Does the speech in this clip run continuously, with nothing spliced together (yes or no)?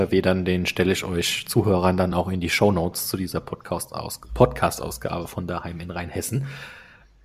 yes